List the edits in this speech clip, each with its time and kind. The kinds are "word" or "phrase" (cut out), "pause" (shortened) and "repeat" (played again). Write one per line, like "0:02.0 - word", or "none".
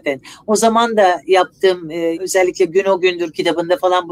0:02.1 - word